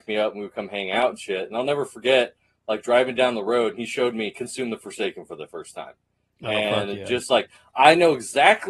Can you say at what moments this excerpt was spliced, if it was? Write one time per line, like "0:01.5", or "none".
none

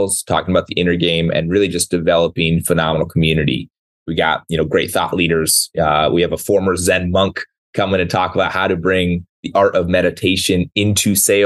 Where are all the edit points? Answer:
none

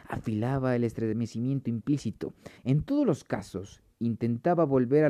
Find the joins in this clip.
0:02.6

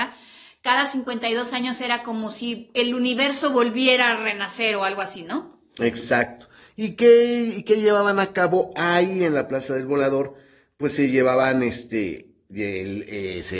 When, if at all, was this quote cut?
none

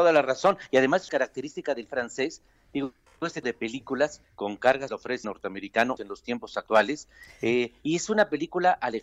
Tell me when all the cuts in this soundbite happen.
0:01.1
0:01.9
0:03.4
0:04.2
0:04.9
0:05.2
0:06.0

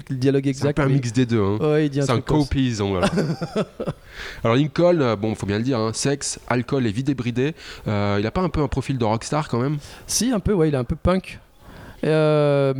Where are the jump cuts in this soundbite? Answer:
none

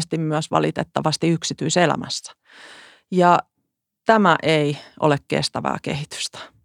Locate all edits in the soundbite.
none

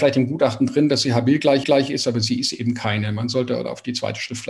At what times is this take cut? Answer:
0:01.6

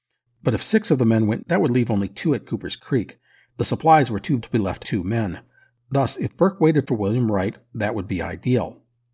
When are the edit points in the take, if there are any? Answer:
0:01.4
0:04.4
0:04.8

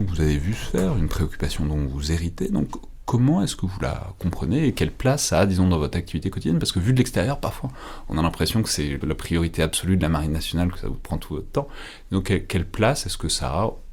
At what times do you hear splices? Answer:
0:09.0

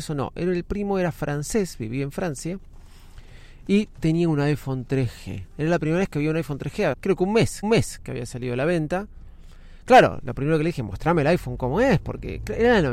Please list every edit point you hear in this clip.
0:06.9
0:07.6

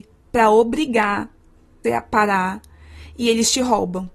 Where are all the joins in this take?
0:01.8

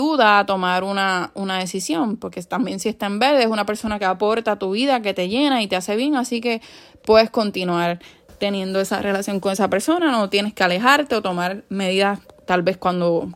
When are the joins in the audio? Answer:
none

